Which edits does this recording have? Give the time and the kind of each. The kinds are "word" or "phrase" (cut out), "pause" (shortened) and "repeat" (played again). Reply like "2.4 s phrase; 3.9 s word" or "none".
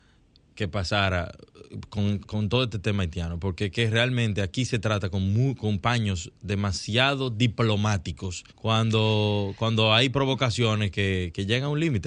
2.2 s word; 8.5 s pause

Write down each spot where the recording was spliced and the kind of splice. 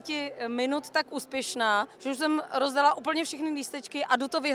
1.9 s pause

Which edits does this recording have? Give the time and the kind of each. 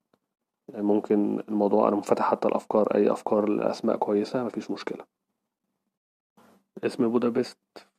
none

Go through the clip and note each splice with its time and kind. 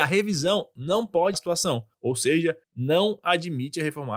1.3 s phrase; 1.9 s pause; 2.6 s pause

